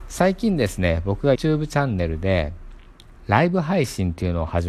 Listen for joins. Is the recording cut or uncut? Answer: cut